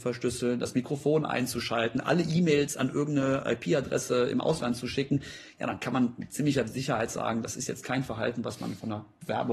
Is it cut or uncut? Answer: uncut